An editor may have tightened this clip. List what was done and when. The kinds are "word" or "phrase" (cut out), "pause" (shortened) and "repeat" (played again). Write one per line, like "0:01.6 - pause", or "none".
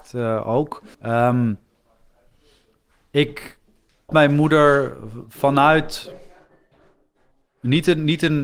0:00.9 - pause
0:04.1 - word